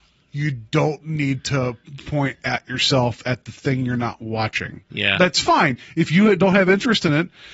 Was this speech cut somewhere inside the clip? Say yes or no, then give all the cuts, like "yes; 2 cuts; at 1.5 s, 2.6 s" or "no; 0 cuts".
no; 0 cuts